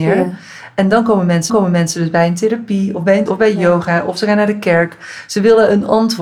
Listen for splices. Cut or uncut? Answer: cut